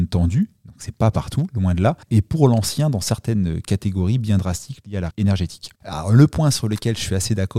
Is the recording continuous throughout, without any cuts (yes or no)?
no